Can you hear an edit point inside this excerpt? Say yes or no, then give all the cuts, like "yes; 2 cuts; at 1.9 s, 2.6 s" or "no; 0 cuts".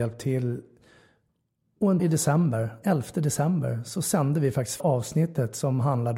yes; 3 cuts; at 2.0 s, 2.8 s, 4.8 s